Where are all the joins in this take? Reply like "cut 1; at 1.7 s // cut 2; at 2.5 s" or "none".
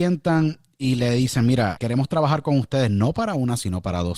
cut 1; at 1.8 s